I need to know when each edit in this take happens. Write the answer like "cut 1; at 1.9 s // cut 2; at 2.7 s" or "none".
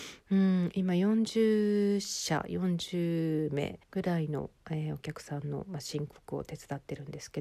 cut 1; at 3.8 s